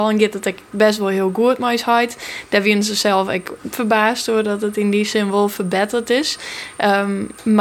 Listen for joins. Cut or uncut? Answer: uncut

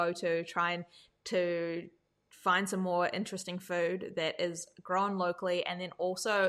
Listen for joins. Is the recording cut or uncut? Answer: uncut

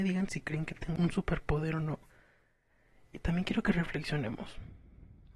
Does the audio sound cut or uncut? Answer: uncut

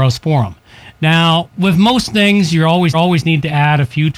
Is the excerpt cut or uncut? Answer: cut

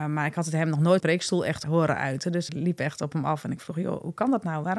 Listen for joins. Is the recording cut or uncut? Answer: cut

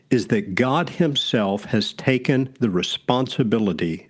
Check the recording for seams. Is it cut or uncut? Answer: uncut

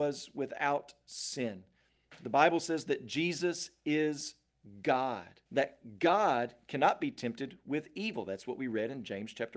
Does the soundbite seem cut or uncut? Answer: cut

